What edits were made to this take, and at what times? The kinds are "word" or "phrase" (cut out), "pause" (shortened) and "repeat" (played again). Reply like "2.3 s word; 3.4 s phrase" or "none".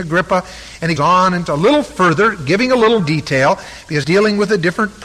1.0 s word; 1.5 s word; 3.0 s word; 4.0 s word